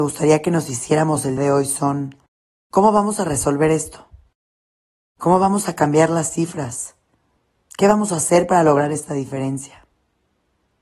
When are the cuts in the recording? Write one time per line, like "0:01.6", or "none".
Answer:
0:01.4